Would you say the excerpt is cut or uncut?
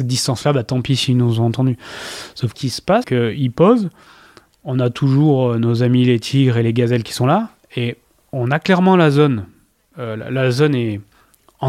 cut